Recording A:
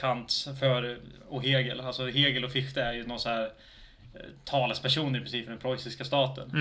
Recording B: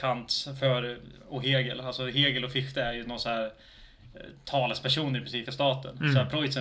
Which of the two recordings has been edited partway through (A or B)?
B